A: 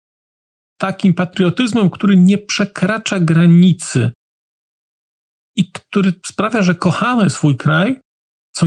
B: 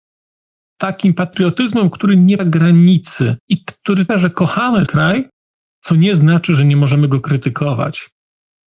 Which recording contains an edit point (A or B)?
B